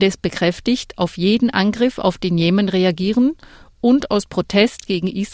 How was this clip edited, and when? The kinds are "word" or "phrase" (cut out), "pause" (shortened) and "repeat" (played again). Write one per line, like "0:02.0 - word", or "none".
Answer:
none